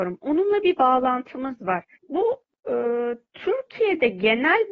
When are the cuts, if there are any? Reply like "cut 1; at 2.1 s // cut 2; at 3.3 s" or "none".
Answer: cut 1; at 2.0 s // cut 2; at 3.3 s